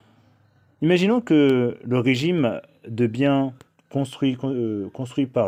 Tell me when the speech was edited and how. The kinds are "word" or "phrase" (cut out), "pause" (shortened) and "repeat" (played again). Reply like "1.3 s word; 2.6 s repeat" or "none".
none